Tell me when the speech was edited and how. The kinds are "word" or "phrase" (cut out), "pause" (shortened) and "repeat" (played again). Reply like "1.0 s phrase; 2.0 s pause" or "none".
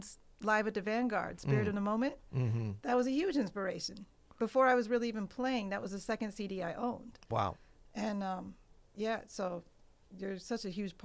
none